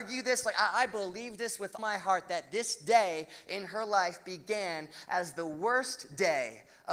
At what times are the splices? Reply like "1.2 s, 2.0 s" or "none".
1.8 s